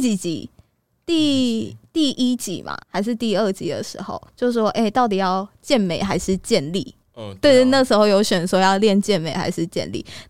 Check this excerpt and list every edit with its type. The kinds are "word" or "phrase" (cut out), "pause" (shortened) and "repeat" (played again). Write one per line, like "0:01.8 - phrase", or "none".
0:02.8 - pause
0:04.3 - pause
0:07.0 - pause